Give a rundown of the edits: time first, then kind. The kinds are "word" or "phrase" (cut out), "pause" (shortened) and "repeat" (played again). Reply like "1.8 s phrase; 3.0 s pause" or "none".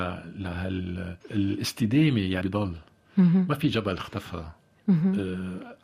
1.2 s pause; 2.4 s word